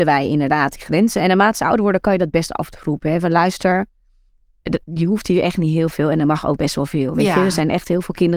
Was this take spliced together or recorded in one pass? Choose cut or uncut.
uncut